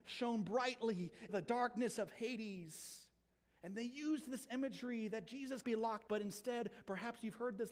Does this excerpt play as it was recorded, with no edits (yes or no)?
no